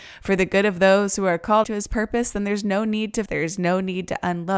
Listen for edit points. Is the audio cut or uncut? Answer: cut